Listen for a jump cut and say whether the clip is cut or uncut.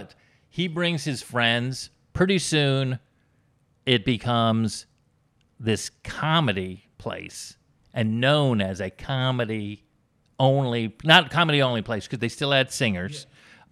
uncut